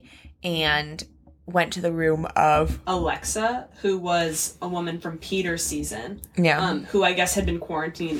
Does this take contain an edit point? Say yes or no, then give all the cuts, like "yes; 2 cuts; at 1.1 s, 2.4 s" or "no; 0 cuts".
no; 0 cuts